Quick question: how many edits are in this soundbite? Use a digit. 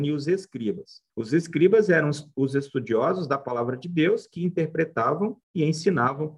2